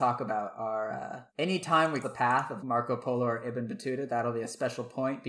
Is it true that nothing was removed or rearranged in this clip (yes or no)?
no